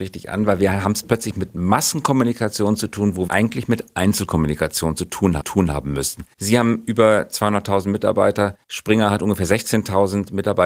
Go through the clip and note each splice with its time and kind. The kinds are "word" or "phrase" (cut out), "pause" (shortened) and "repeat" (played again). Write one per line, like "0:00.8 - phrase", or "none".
0:03.3 - phrase
0:05.4 - repeat
0:06.3 - pause
0:08.6 - pause